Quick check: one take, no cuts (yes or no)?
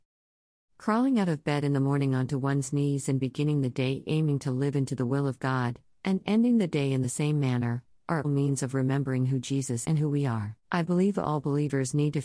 no